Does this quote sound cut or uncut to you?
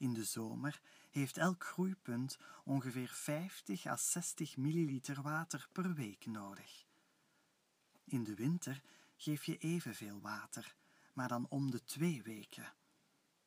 uncut